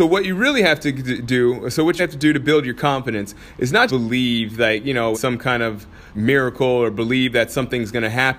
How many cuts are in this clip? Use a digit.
4